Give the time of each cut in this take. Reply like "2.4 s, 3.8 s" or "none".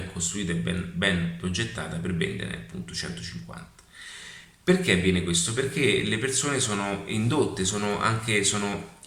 none